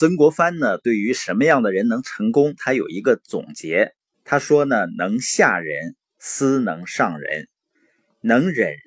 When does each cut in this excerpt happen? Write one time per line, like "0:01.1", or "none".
0:04.1

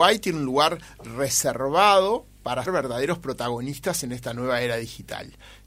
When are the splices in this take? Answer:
0:02.7

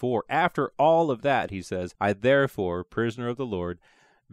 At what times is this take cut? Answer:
0:01.9

